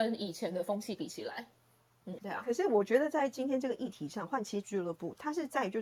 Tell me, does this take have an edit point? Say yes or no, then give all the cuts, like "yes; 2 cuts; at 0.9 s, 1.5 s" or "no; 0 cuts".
yes; 1 cut; at 2.2 s